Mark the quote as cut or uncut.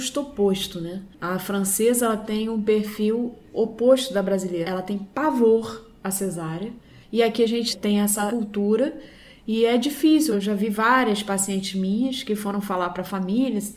cut